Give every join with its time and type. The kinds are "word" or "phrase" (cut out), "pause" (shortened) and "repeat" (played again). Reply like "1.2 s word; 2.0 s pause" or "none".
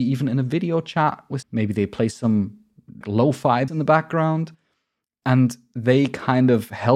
1.4 s word; 3.0 s word; 3.7 s word